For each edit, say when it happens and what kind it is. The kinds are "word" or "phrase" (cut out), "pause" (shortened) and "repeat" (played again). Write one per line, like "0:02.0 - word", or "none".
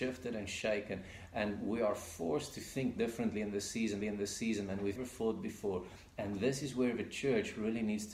0:04.0 - repeat
0:05.0 - word